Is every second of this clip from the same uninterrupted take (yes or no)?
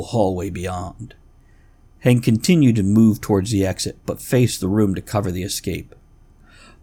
yes